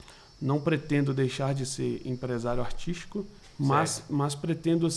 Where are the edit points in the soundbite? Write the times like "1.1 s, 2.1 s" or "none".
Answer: 3.4 s